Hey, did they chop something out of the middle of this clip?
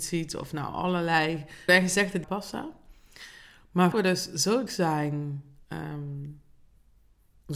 yes; 4 cuts; at 1.7 s, 2.2 s, 3.9 s, 4.7 s

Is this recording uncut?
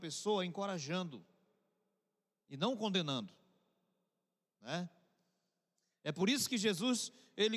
yes; 0 cuts

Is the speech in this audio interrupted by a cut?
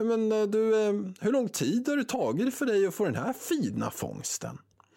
no; 0 cuts

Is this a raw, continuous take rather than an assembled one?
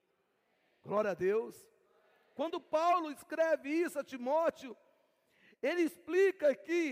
yes; 0 cuts

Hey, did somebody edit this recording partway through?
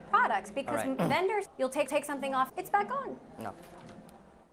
yes; 3 cuts; at 1.5 s, 1.9 s, 2.5 s

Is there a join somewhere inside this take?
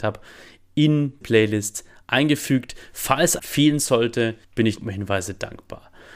yes; 4 cuts; at 1.2 s, 3.4 s, 4.4 s, 4.8 s

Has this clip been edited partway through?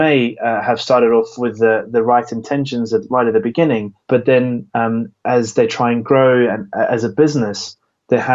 yes; 1 cut; at 4.0 s

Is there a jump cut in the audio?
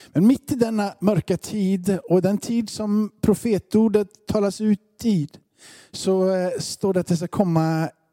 no; 0 cuts

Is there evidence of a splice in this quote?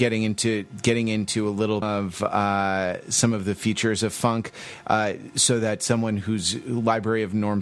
yes; 1 cut; at 1.8 s

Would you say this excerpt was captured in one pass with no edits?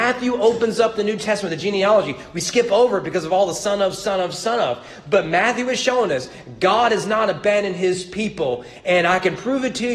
yes; 0 cuts

